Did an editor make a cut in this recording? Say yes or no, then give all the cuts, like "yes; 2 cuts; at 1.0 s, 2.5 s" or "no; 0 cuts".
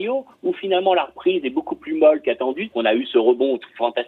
yes; 1 cut; at 2.7 s